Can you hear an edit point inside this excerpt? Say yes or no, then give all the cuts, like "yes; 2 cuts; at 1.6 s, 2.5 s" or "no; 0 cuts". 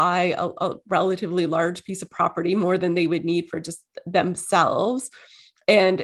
no; 0 cuts